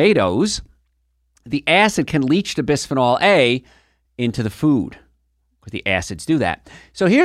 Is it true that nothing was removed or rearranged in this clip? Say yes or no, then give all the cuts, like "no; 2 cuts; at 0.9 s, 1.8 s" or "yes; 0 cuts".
yes; 0 cuts